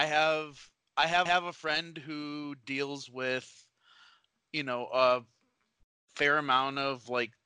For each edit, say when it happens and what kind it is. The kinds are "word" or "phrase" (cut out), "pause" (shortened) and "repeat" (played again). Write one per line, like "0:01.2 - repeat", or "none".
0:01.3 - repeat